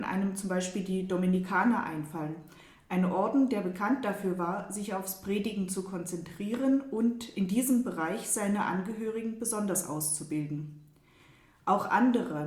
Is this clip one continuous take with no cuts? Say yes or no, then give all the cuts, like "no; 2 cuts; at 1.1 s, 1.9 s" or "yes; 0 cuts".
yes; 0 cuts